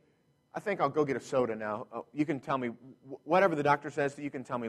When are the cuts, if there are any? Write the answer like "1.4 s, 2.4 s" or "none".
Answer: none